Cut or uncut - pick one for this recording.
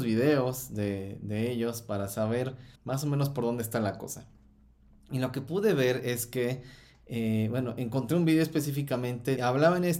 cut